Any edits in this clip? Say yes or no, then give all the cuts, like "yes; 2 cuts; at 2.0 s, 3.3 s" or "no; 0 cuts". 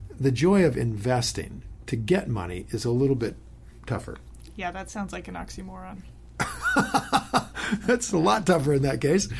no; 0 cuts